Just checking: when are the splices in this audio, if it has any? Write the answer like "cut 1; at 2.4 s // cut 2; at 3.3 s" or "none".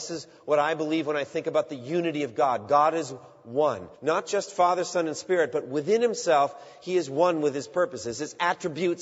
cut 1; at 3.9 s